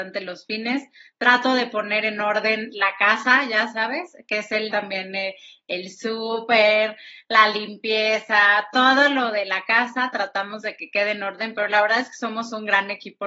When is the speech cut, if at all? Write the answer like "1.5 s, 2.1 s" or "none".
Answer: 4.7 s